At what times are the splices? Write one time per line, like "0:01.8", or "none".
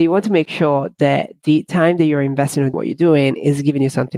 0:02.7